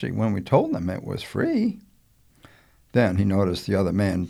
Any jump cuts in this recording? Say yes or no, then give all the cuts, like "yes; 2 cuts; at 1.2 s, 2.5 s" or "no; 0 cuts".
no; 0 cuts